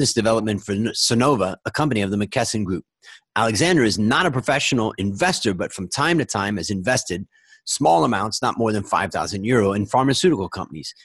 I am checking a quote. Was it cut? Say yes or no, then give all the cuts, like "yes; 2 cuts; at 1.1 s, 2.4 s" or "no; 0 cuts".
no; 0 cuts